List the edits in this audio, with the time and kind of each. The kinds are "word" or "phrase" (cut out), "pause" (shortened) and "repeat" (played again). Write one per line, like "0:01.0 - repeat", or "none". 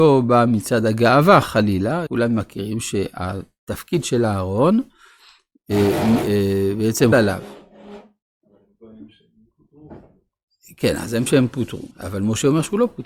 0:02.1 - word
0:07.1 - word
0:11.3 - word
0:11.9 - pause